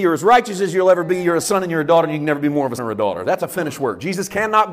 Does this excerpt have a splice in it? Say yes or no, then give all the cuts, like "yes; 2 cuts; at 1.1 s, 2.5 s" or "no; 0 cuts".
yes; 1 cut; at 2.8 s